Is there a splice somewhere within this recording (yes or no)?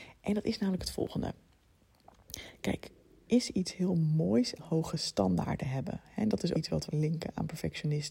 yes